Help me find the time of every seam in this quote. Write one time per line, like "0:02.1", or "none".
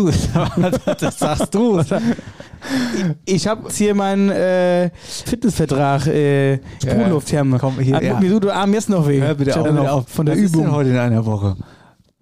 0:01.8
0:03.7
0:05.3
0:06.8
0:08.0
0:09.6